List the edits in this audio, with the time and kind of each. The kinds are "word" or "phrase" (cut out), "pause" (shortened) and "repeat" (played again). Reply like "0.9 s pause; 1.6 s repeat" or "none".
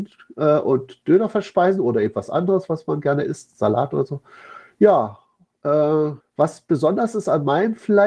6.2 s pause